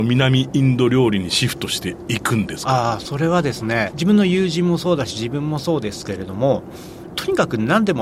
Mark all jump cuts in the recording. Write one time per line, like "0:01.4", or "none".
0:03.9